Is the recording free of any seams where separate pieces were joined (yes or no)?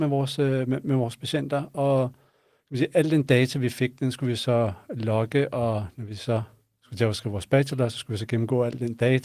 yes